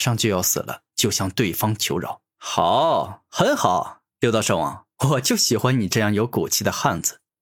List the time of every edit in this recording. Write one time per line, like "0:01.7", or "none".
0:02.3
0:04.1
0:04.9